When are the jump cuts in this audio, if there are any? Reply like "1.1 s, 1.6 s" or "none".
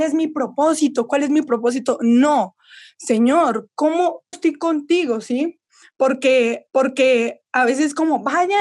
4.3 s, 6.7 s